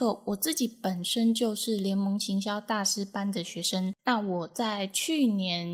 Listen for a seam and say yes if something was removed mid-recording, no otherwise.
yes